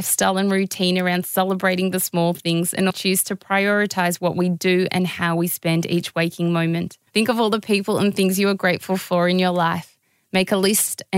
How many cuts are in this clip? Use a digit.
2